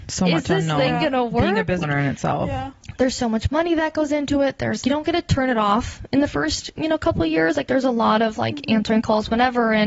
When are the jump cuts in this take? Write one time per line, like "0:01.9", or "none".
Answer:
0:01.8
0:04.8

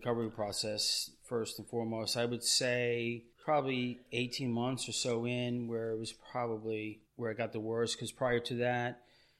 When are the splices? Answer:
0:03.3
0:07.1

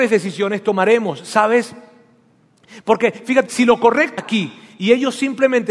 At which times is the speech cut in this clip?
0:03.5
0:04.2

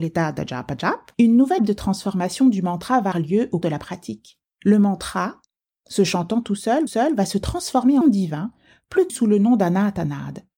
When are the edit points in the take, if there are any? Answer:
0:01.1
0:01.6
0:03.1
0:03.6
0:04.4
0:06.9
0:08.0
0:09.1

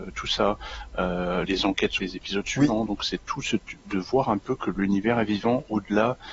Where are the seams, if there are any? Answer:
0:01.5
0:02.0
0:04.4

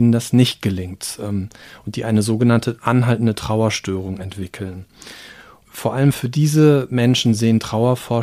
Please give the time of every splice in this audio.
none

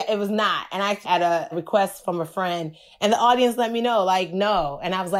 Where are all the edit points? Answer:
0:01.0
0:01.5

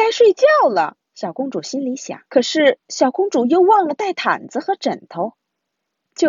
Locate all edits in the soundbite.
0:01.1
0:02.3

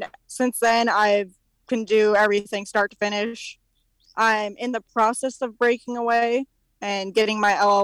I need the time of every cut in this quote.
none

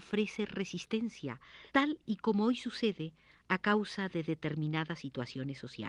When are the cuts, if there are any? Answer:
0:01.7

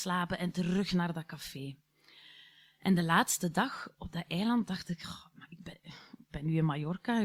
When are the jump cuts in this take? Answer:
none

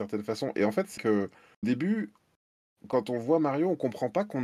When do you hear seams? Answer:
0:01.0
0:01.6

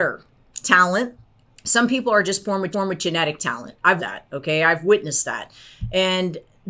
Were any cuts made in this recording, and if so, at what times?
0:01.5
0:02.7
0:04.0

